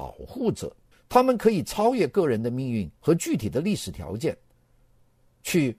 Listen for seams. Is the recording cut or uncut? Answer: cut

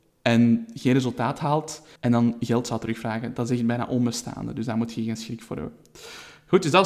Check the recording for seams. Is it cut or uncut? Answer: cut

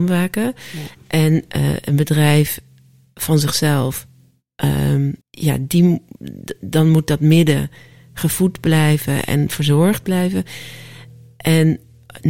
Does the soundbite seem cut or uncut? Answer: cut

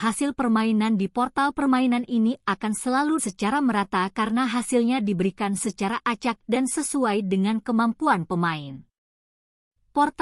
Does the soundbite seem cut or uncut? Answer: cut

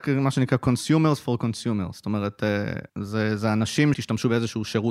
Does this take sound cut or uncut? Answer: cut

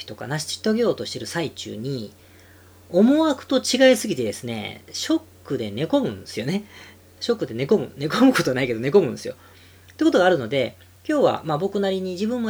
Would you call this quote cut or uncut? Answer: cut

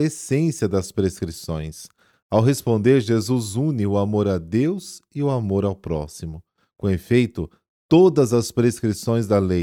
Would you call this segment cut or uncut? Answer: uncut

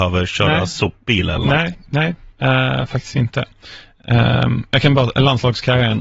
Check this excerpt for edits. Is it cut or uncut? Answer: cut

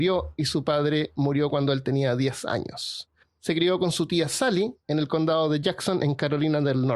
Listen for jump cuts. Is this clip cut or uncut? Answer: uncut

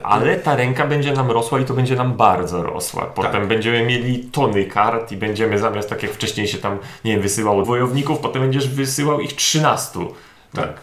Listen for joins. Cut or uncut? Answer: cut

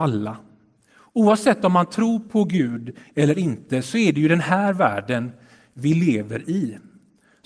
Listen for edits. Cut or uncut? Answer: uncut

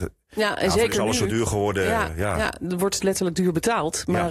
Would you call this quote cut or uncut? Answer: cut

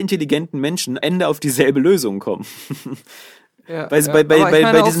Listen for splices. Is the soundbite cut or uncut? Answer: cut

